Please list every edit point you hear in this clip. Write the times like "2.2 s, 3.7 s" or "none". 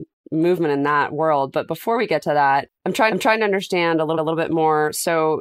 3.1 s, 4.2 s